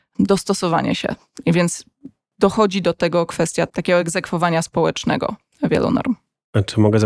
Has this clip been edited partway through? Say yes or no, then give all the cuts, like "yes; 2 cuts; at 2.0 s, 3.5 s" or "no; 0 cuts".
no; 0 cuts